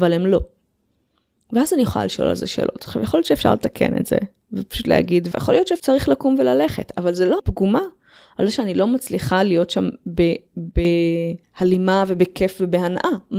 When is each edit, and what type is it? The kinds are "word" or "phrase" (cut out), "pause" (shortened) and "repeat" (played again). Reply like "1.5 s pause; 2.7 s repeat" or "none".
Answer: 5.3 s phrase; 7.4 s word